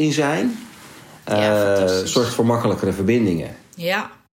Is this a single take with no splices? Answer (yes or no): yes